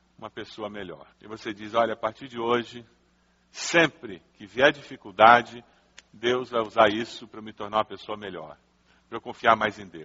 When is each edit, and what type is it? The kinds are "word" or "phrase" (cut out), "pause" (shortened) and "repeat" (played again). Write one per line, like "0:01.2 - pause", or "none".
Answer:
0:01.1 - pause